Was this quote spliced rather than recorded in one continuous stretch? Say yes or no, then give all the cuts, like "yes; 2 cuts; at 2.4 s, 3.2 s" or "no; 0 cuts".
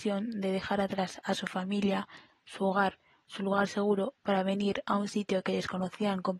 no; 0 cuts